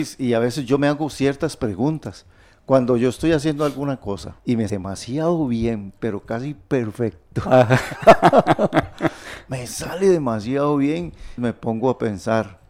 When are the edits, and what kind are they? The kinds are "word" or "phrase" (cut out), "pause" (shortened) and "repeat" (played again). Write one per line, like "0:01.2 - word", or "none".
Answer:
0:04.4 - pause
0:04.7 - word
0:11.4 - word